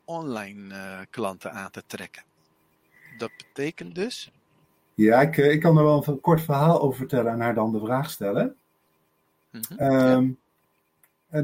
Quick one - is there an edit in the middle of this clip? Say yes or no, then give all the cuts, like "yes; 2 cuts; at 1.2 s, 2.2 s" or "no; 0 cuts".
no; 0 cuts